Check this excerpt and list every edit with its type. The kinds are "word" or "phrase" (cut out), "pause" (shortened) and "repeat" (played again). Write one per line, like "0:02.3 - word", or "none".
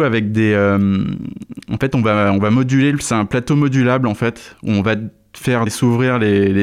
0:05.7 - word